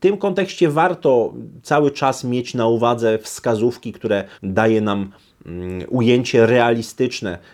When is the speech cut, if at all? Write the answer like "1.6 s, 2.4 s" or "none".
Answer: 4.3 s